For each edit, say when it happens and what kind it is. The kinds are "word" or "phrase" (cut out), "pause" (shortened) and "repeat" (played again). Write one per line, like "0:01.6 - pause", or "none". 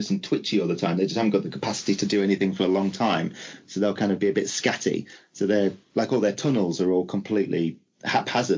none